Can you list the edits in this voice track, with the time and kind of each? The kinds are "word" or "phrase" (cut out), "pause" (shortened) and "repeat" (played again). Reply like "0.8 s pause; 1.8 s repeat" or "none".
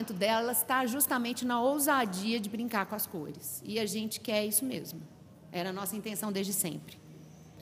none